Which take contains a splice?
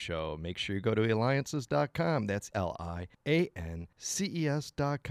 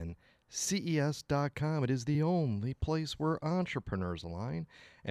first; 3 cuts; at 2.5 s, 3.1 s, 3.9 s

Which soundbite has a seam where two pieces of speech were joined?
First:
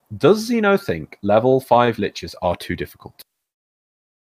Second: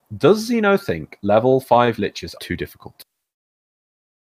second; 1 cut; at 2.4 s

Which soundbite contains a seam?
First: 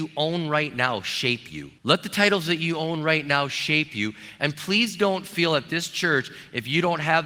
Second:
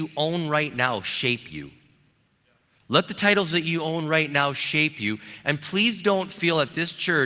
first; 1 cut; at 1.8 s

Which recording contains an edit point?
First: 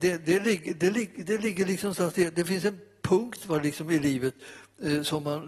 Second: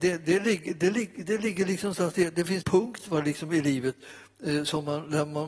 second; 1 cut; at 2.6 s

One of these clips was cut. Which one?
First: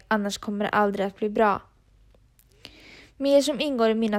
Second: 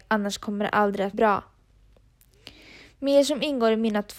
second; 1 cut; at 1.1 s

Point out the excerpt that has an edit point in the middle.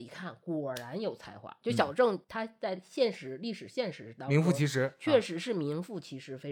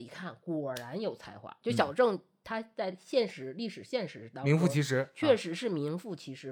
first; 1 cut; at 2.2 s

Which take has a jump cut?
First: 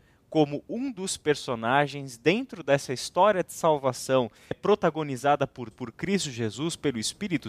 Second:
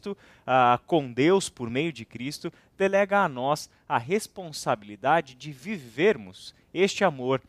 first; 2 cuts; at 4.5 s, 5.7 s

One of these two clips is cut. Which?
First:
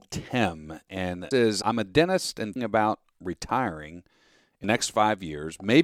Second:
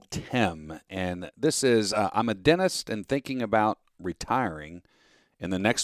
first; 4 cuts; at 1.3 s, 1.6 s, 2.6 s, 4.6 s

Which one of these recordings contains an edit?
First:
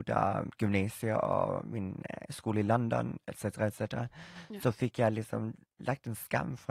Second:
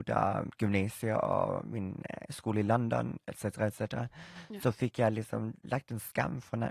second; 1 cut; at 5.6 s

